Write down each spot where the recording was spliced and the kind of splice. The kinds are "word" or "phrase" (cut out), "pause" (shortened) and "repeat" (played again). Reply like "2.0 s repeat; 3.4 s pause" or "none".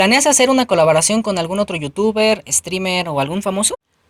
none